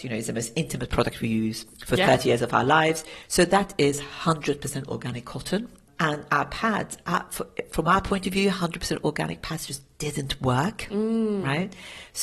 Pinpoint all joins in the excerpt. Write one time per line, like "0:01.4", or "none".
none